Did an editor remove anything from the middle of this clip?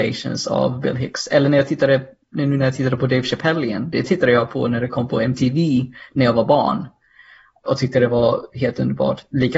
no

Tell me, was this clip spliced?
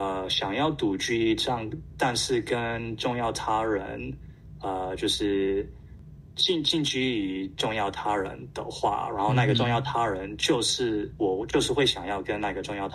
no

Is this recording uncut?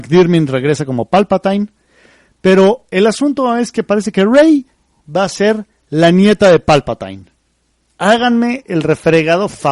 yes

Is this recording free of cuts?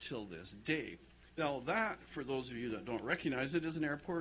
no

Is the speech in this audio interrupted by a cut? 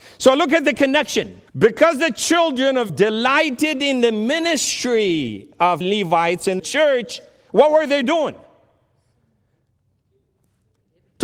yes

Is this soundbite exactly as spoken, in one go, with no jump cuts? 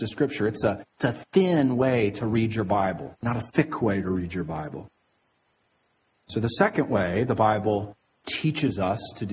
yes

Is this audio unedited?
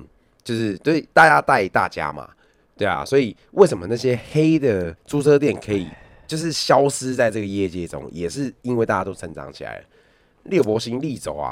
no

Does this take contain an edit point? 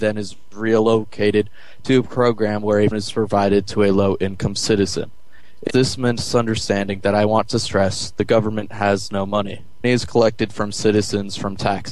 yes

